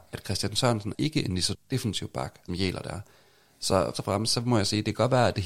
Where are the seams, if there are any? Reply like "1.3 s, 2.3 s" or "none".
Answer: 0.9 s, 1.5 s, 2.5 s, 3.9 s